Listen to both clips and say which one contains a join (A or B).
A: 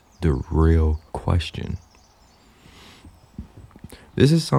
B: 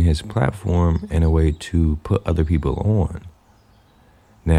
A